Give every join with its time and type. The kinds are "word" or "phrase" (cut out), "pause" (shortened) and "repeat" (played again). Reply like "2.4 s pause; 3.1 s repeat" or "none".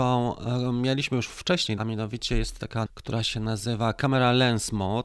1.8 s phrase; 2.9 s word